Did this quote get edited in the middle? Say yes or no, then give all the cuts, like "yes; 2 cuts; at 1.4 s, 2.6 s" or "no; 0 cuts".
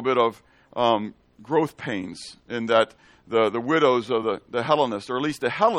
no; 0 cuts